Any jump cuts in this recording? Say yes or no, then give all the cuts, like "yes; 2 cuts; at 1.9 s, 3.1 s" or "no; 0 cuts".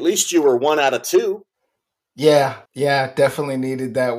yes; 1 cut; at 2.6 s